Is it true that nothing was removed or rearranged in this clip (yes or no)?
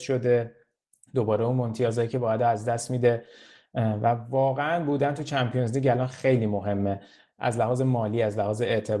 yes